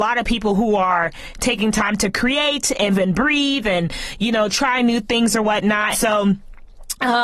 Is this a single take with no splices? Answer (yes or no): no